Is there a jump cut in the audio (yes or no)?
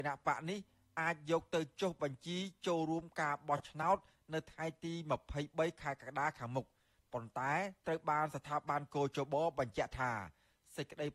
no